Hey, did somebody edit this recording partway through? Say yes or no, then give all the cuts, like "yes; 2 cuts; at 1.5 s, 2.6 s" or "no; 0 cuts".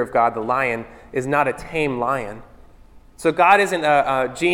no; 0 cuts